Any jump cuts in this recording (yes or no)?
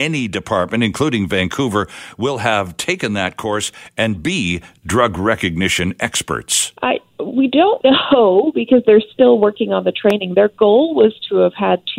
yes